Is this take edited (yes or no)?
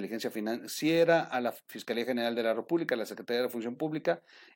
no